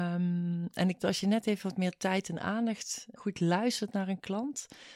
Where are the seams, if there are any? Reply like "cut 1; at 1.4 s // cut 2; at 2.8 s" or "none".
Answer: cut 1; at 1.0 s // cut 2; at 3.2 s